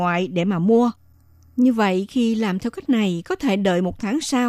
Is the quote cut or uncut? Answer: uncut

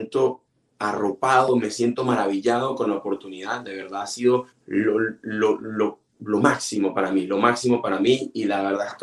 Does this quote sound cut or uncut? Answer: cut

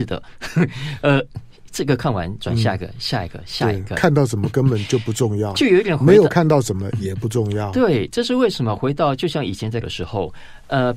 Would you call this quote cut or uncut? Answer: cut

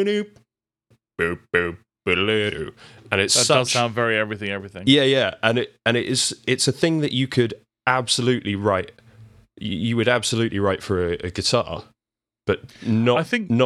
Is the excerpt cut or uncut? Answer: uncut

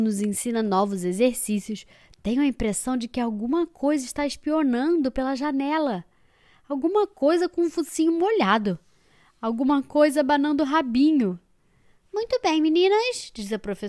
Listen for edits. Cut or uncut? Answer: uncut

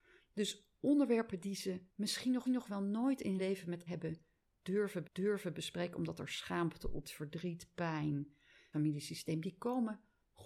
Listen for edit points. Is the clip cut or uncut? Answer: cut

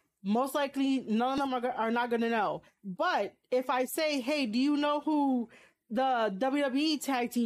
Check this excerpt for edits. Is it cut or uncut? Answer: uncut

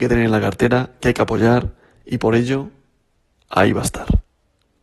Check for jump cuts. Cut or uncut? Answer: uncut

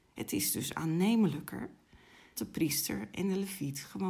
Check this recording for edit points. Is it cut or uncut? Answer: cut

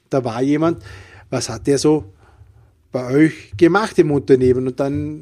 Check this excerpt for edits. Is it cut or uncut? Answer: uncut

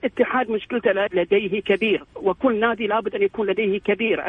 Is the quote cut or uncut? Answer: cut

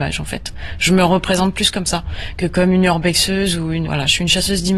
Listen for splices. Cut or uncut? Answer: cut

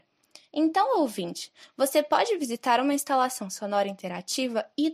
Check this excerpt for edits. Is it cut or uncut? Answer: uncut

